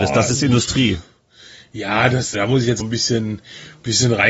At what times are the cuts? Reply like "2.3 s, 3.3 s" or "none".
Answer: 2.3 s, 2.8 s